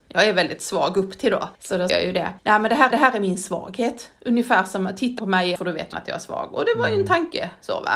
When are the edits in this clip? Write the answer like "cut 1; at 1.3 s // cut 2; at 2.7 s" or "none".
cut 1; at 1.5 s // cut 2; at 1.9 s // cut 3; at 2.4 s // cut 4; at 2.9 s // cut 5; at 5.2 s // cut 6; at 5.6 s // cut 7; at 5.9 s